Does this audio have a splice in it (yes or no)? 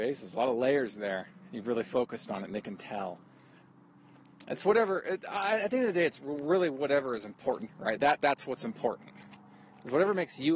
yes